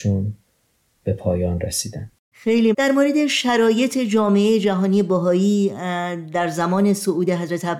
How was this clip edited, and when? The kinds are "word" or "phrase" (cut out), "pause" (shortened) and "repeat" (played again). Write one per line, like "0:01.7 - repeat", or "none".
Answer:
0:02.7 - word